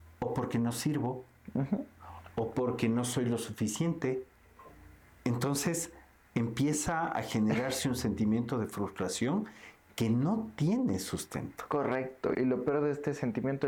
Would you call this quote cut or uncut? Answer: cut